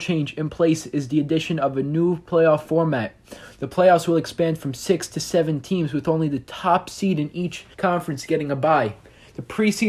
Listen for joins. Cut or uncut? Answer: cut